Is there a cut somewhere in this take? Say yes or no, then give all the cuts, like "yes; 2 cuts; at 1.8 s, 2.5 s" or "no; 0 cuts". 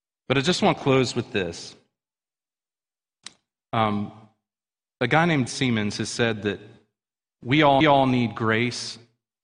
yes; 2 cuts; at 5.5 s, 7.8 s